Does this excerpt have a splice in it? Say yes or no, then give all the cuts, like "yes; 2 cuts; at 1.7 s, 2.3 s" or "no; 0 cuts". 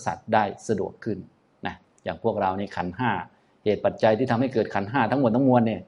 no; 0 cuts